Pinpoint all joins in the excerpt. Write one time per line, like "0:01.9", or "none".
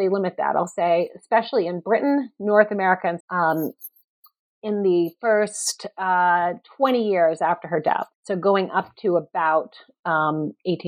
0:03.2
0:08.1